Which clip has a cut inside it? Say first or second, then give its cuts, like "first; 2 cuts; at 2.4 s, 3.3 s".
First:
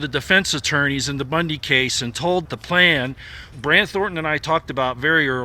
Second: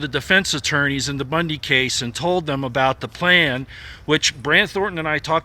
first; 2 cuts; at 2.4 s, 3.5 s